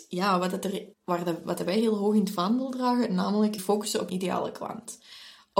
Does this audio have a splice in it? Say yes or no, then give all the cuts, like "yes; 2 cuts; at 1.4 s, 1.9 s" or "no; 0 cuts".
yes; 3 cuts; at 0.9 s, 3.6 s, 4.1 s